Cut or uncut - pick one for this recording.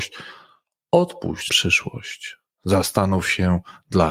cut